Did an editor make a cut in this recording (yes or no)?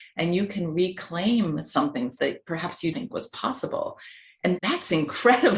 yes